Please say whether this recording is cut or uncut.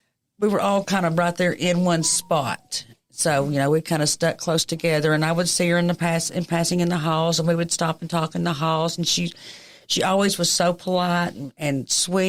uncut